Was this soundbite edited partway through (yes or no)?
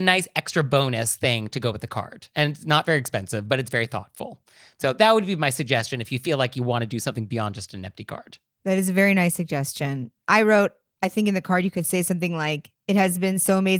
no